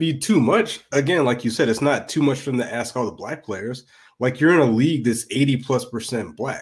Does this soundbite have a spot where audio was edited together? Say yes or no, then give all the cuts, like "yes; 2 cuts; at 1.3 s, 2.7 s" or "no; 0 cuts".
no; 0 cuts